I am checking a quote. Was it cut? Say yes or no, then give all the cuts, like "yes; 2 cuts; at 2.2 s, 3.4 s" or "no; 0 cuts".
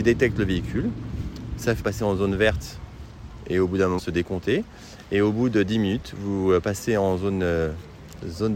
yes; 2 cuts; at 1.8 s, 4.0 s